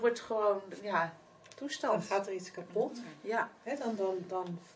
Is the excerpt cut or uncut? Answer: uncut